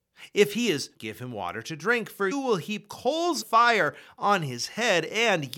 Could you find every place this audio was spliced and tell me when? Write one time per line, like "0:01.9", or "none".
0:00.9
0:02.3
0:03.4